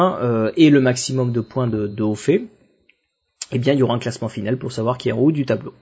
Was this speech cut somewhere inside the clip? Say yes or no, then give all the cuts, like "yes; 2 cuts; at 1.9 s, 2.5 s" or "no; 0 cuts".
yes; 1 cut; at 1.9 s